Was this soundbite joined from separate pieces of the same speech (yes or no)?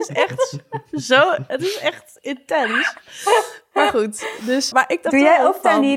yes